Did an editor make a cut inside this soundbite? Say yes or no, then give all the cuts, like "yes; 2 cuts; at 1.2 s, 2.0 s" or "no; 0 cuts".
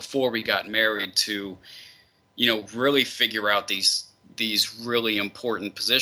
no; 0 cuts